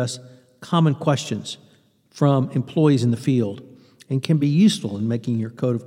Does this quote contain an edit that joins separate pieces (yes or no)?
no